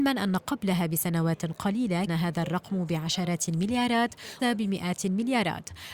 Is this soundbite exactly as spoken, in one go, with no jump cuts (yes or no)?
no